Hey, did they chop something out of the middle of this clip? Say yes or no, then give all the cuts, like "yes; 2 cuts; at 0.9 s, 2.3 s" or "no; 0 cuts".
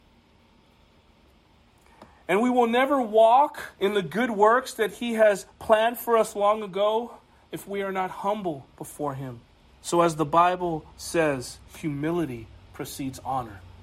yes; 3 cuts; at 3.7 s, 9.7 s, 11.7 s